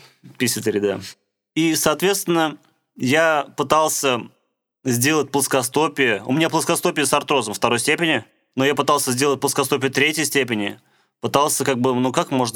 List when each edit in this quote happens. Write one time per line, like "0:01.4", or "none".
none